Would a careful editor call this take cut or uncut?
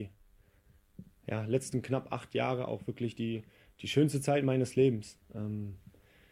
uncut